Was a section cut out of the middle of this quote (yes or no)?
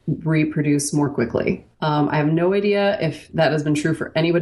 yes